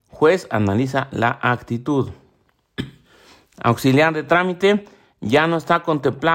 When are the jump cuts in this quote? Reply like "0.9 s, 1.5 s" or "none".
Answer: none